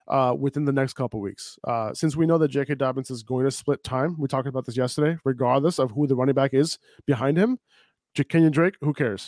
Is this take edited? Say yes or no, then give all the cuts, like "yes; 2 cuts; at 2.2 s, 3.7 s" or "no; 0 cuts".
no; 0 cuts